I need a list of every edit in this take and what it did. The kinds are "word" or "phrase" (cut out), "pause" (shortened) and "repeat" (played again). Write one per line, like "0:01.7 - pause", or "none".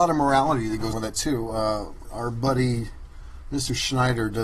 0:00.9 - word
0:02.0 - word